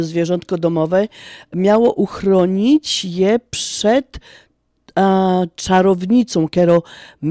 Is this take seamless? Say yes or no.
yes